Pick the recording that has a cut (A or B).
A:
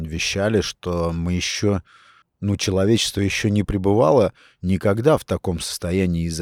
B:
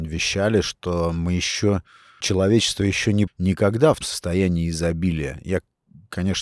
B